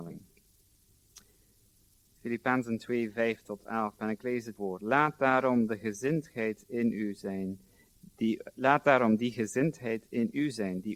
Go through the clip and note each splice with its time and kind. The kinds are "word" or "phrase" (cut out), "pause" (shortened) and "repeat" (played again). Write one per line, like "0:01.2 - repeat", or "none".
0:04.6 - word